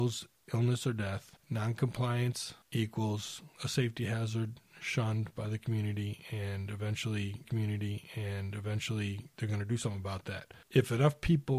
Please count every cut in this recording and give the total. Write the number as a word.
two